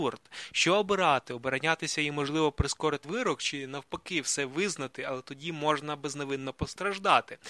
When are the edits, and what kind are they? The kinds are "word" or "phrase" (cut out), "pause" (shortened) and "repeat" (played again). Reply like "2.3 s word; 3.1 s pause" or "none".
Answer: 3.0 s word